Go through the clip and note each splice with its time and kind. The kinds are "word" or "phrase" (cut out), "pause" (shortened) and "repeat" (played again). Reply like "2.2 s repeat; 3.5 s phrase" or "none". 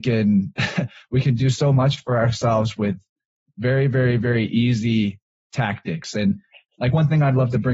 none